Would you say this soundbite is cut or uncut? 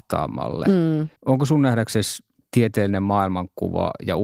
cut